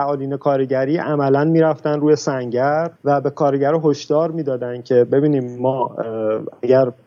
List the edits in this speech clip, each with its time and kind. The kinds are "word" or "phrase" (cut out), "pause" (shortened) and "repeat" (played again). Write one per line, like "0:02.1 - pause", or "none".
0:03.0 - pause